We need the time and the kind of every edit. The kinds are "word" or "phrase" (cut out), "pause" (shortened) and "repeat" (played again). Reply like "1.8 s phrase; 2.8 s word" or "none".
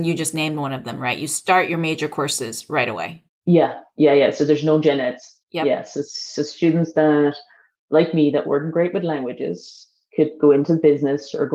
3.3 s pause; 5.4 s pause